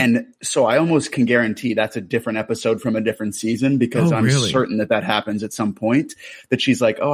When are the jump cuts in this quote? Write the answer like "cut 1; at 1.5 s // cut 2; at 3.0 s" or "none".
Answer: none